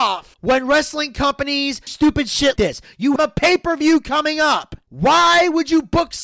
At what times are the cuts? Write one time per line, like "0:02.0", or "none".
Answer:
0:01.9
0:02.6
0:03.2